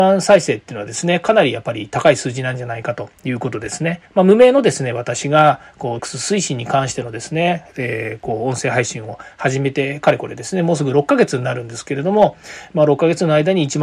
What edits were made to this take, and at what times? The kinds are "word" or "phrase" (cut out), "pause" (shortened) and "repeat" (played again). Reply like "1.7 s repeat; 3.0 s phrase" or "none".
4.1 s pause; 6.0 s word